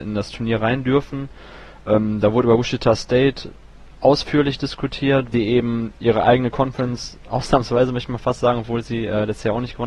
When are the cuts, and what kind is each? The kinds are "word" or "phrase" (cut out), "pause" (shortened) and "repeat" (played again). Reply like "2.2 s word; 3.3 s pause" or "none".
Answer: 5.3 s word